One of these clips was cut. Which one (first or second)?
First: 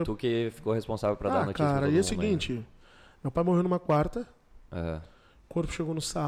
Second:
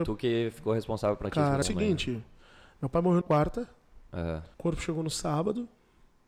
second